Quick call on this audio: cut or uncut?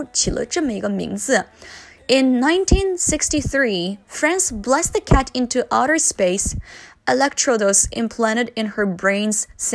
uncut